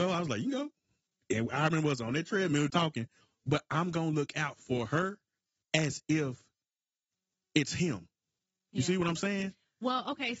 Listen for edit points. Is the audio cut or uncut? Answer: cut